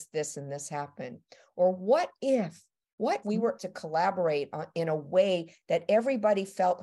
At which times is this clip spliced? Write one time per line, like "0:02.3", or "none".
0:03.2
0:03.6